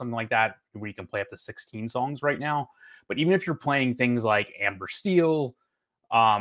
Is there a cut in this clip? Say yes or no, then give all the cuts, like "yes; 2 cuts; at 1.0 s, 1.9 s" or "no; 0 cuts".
no; 0 cuts